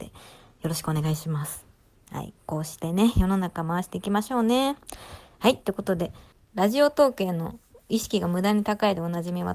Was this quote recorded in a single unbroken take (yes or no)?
yes